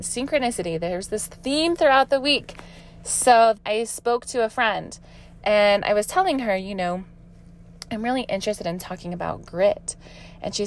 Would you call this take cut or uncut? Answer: cut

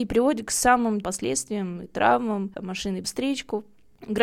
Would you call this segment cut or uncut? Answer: cut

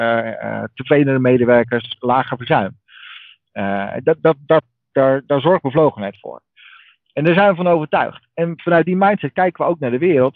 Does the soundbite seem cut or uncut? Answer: uncut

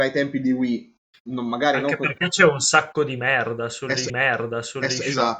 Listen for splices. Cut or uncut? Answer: cut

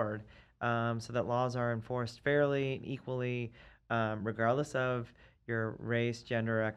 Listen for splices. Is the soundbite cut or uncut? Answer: uncut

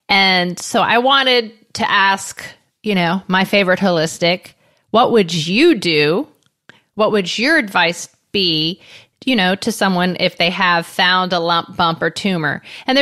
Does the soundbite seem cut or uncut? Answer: uncut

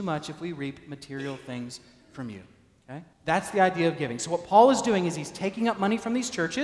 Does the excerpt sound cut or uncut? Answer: cut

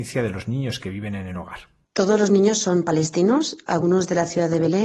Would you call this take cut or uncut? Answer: cut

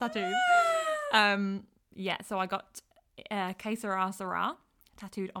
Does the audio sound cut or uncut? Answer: uncut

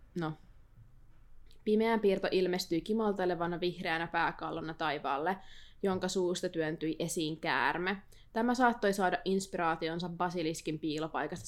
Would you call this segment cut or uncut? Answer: uncut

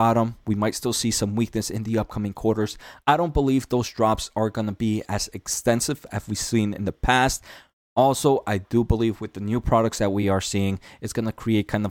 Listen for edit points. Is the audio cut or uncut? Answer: uncut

